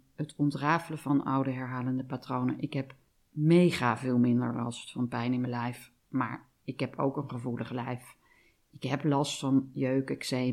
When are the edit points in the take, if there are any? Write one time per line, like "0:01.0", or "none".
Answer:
none